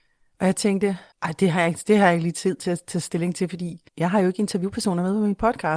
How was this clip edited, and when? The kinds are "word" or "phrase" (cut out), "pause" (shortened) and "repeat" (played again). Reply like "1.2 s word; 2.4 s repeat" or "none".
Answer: 1.1 s pause; 3.9 s pause